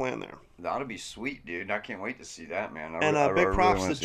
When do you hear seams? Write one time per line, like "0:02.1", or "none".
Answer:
none